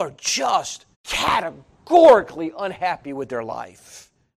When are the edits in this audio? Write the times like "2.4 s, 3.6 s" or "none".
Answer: 0.9 s

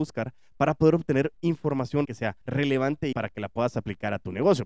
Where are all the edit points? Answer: 2.1 s, 2.4 s, 3.1 s

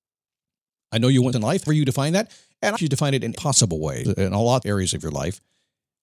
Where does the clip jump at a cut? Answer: 1.3 s, 1.7 s, 2.8 s, 3.3 s, 4.0 s, 4.6 s

